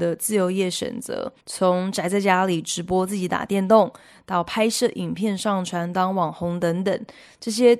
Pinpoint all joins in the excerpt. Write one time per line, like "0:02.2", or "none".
0:01.4